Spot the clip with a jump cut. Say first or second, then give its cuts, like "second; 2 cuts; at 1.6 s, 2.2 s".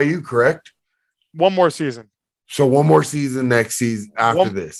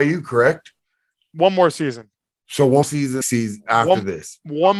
second; 2 cuts; at 2.8 s, 3.2 s